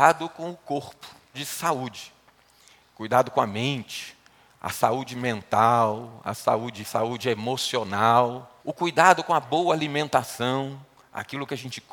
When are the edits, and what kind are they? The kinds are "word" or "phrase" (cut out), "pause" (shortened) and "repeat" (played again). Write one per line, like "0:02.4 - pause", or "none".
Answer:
0:01.3 - word
0:06.8 - phrase
0:08.6 - pause